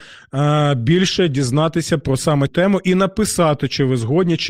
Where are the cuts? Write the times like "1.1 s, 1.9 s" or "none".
2.5 s

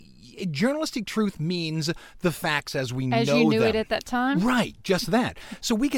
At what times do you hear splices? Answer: none

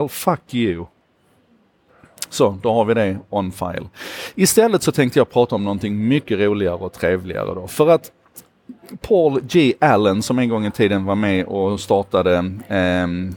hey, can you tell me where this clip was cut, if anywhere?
none

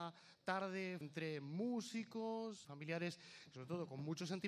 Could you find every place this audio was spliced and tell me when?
1.0 s, 2.6 s

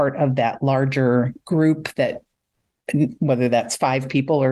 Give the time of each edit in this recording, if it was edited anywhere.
none

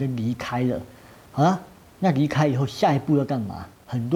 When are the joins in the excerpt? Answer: none

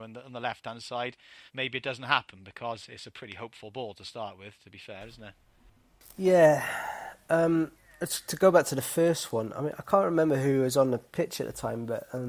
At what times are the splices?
1.5 s

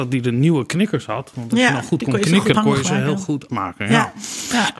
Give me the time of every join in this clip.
2.5 s, 3.5 s

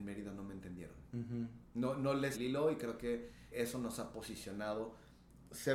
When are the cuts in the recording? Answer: 2.3 s, 3.5 s

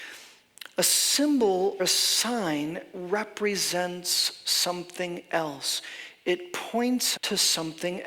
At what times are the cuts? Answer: 1.8 s, 7.2 s

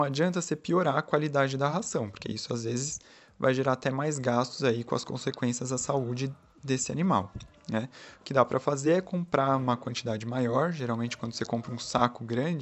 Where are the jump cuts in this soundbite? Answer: none

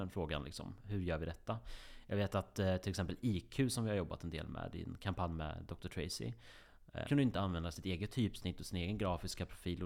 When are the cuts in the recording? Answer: 7.0 s

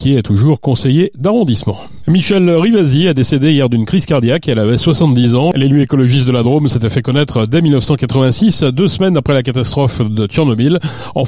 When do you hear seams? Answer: none

